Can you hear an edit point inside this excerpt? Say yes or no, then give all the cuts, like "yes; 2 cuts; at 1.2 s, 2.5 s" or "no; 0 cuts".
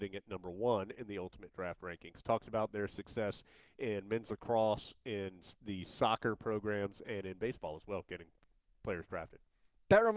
no; 0 cuts